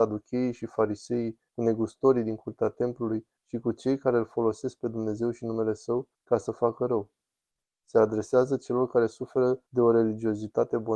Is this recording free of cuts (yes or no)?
no